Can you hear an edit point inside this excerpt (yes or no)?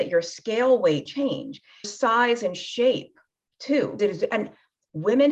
yes